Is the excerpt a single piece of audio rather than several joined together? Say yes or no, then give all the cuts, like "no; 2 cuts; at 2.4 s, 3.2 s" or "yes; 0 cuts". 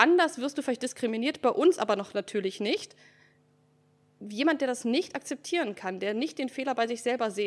yes; 0 cuts